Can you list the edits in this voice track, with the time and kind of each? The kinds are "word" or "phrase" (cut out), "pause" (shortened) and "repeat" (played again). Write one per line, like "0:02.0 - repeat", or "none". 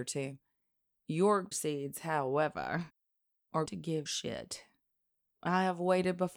0:01.5 - word
0:03.7 - word
0:04.1 - word